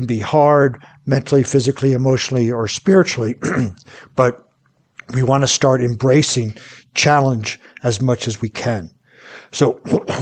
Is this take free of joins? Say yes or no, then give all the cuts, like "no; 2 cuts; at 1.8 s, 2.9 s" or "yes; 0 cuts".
yes; 0 cuts